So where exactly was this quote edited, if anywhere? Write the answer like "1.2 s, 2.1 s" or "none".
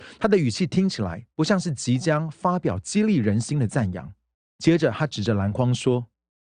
1.3 s, 4.3 s